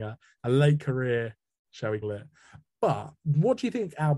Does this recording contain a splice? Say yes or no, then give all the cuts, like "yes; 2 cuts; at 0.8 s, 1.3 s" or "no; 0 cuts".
yes; 2 cuts; at 1.6 s, 2.0 s